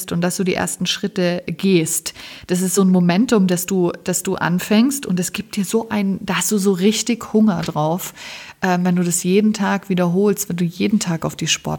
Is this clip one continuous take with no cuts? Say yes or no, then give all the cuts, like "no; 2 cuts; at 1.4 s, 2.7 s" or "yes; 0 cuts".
yes; 0 cuts